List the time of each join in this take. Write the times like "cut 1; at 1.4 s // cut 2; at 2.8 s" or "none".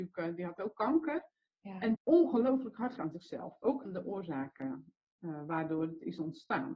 cut 1; at 1.9 s // cut 2; at 3.0 s // cut 3; at 3.8 s